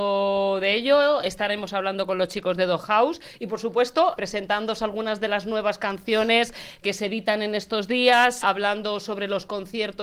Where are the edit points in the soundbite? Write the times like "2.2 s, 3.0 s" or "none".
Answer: 4.2 s, 6.8 s, 8.4 s